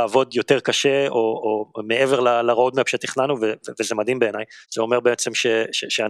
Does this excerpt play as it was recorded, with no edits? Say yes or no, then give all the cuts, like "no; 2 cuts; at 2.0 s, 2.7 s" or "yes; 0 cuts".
no; 1 cut; at 4.6 s